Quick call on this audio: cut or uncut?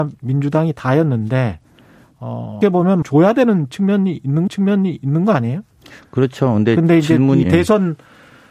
cut